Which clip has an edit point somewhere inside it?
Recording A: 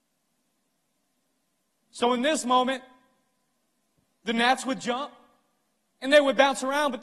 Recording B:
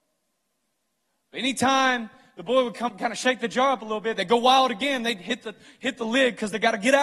B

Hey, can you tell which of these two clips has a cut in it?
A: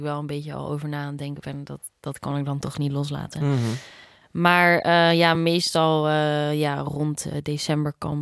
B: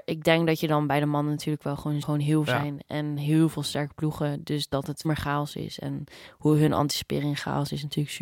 B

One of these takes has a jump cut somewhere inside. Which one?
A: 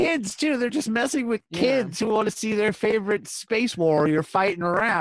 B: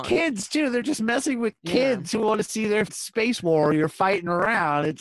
B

